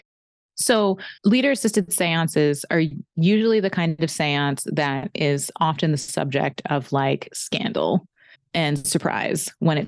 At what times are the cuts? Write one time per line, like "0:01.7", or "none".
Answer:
0:01.2
0:08.4